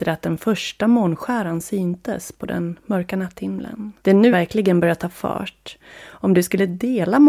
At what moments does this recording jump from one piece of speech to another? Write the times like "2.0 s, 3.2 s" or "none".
4.0 s, 4.3 s